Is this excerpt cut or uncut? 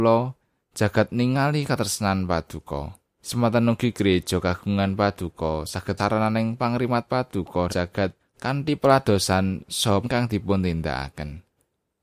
cut